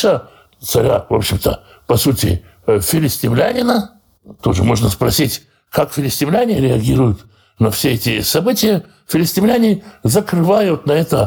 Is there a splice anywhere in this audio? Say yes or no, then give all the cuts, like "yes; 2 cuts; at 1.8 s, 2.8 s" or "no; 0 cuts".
no; 0 cuts